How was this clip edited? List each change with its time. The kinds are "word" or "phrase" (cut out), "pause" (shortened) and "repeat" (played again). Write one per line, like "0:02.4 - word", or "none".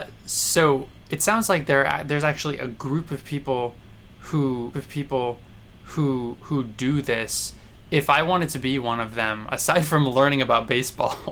0:04.7 - repeat